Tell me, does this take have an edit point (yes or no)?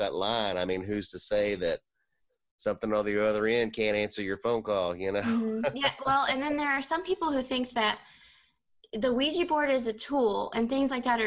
no